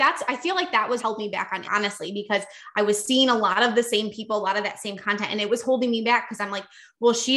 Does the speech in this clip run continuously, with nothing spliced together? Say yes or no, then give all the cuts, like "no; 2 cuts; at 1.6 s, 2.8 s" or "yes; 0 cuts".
no; 2 cuts; at 1.0 s, 1.6 s